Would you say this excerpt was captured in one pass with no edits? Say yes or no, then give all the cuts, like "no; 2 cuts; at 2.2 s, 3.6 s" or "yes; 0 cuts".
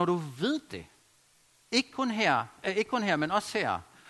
yes; 0 cuts